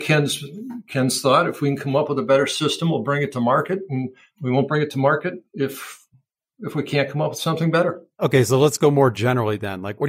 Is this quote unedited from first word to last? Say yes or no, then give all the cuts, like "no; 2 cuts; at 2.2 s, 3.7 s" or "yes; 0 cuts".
yes; 0 cuts